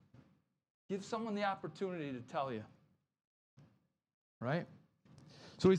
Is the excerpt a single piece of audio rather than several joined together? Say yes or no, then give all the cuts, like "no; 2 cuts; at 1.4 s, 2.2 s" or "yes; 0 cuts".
yes; 0 cuts